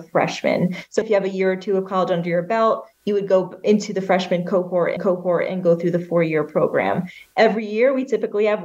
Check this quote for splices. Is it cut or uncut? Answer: cut